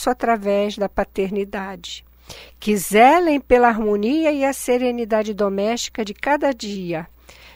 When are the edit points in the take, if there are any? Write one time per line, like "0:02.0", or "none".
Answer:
none